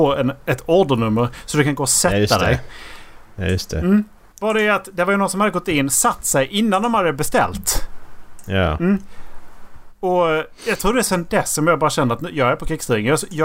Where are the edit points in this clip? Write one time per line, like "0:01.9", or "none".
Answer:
none